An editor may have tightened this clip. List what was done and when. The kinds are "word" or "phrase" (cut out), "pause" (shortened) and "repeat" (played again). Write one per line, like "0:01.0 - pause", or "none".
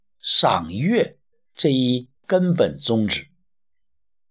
0:01.3 - pause
0:02.2 - pause